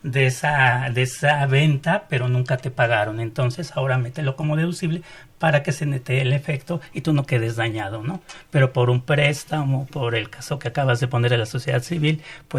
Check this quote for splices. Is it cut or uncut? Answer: uncut